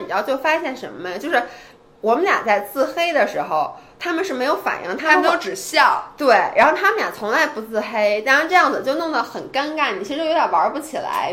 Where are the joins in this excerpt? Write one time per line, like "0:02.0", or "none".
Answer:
none